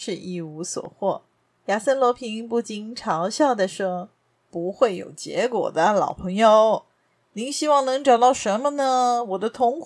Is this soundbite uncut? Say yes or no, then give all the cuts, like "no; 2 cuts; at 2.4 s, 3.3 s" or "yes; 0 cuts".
yes; 0 cuts